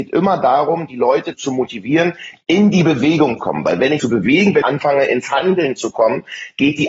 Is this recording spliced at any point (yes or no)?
yes